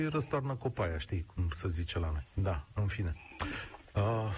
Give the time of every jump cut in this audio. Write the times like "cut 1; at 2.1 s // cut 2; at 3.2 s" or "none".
none